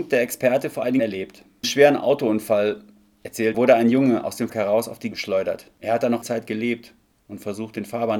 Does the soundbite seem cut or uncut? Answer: cut